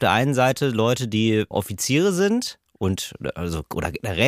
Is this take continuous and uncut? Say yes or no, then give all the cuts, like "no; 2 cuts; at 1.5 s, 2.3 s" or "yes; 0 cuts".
no; 1 cut; at 1.5 s